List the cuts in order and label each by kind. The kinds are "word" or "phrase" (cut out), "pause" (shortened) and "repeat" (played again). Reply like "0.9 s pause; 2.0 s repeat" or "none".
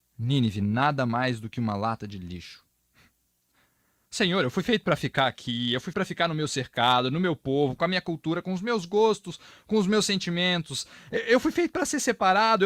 5.9 s word